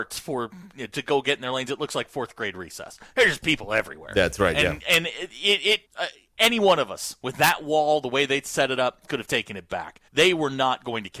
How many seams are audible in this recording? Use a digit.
2